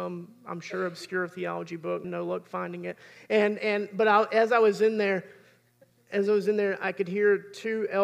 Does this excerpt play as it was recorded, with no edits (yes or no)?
no